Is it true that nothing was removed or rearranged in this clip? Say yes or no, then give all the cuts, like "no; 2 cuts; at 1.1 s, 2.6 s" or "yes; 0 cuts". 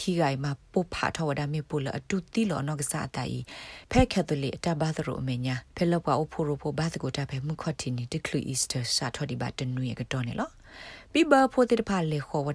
no; 1 cut; at 5.7 s